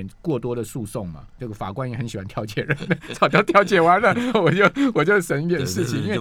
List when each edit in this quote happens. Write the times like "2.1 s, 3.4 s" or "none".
1.4 s, 4.3 s